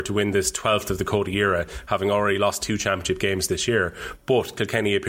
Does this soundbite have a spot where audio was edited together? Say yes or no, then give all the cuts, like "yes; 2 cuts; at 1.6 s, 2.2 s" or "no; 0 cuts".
no; 0 cuts